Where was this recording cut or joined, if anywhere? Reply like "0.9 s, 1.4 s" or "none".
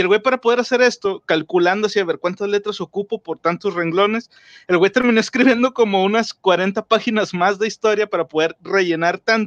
none

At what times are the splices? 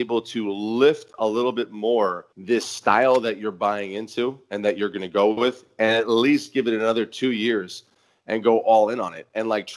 2.3 s

